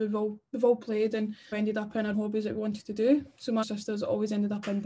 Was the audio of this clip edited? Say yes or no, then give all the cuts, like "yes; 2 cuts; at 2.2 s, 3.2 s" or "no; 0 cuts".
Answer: yes; 3 cuts; at 1.5 s, 2.1 s, 3.6 s